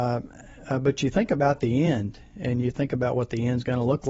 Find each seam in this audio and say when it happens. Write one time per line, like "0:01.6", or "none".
none

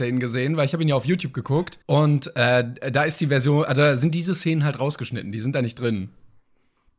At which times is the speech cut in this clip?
0:01.8

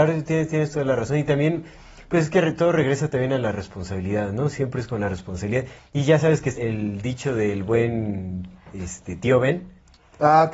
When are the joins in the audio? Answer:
0:06.6

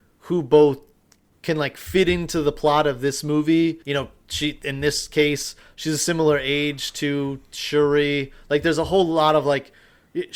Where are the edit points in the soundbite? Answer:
0:03.8

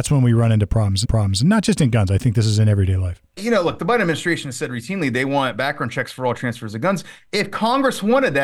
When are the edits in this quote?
0:01.0
0:03.4

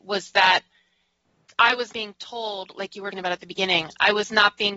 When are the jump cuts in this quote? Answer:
0:01.9
0:03.1

